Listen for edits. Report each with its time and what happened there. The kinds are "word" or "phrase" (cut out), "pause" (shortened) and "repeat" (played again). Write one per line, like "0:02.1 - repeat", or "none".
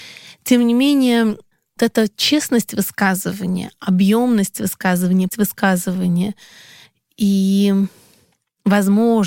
0:01.8 - word
0:05.3 - word